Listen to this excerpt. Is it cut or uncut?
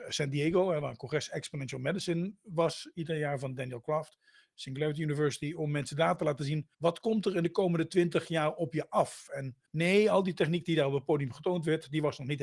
cut